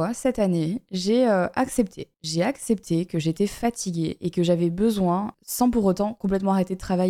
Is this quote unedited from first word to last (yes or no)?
yes